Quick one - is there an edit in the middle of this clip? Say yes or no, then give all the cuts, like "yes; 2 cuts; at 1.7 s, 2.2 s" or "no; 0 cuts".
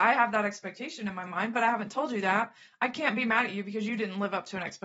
no; 0 cuts